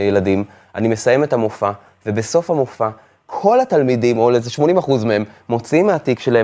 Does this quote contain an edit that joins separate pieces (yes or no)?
no